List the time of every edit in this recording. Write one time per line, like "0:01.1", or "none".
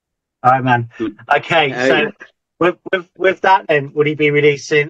none